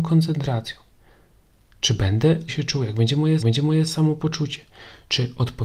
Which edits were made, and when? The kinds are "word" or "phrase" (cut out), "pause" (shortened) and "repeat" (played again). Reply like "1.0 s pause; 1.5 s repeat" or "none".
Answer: 2.5 s word; 3.4 s repeat